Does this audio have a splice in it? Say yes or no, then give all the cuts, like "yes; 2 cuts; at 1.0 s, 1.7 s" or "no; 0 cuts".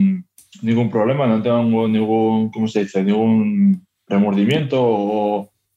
no; 0 cuts